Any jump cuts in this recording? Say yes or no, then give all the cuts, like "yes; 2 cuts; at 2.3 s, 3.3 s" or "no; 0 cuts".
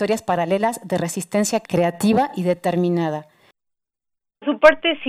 no; 0 cuts